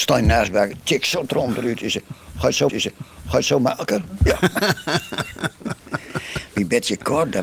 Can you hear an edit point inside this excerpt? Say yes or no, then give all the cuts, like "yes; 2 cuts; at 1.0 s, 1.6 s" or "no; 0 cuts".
yes; 1 cut; at 2.7 s